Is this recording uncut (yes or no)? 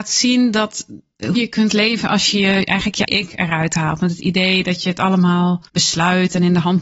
no